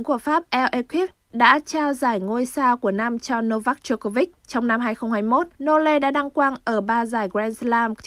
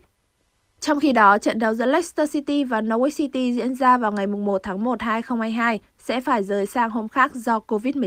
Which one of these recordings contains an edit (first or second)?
first